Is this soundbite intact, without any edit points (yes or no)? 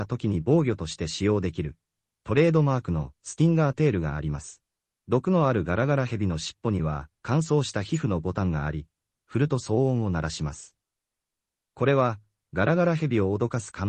no